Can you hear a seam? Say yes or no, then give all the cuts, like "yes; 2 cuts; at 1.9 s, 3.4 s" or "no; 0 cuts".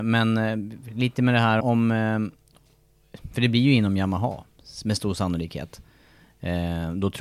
yes; 1 cut; at 1.6 s